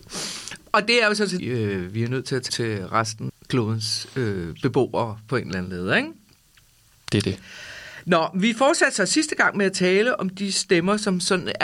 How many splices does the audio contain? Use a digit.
3